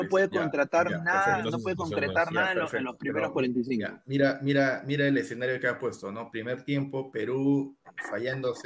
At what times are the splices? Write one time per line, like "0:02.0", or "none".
none